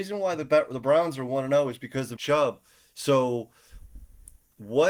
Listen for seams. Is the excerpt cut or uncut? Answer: cut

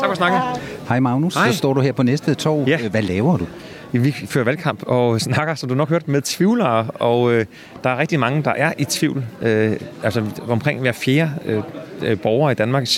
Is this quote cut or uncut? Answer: uncut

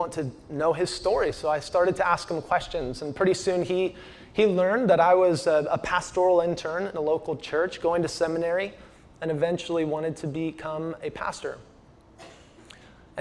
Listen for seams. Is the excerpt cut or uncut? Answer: uncut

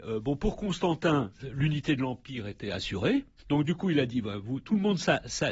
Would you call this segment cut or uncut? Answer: uncut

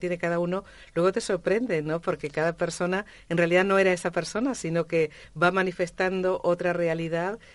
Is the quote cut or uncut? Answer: uncut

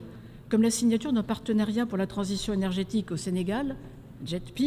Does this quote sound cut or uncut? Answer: uncut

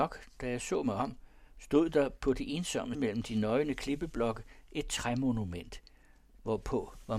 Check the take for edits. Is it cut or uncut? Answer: cut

